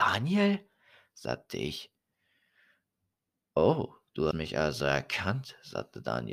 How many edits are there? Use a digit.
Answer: 1